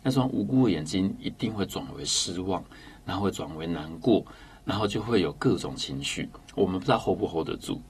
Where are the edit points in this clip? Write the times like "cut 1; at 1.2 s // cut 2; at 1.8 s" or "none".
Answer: cut 1; at 6.4 s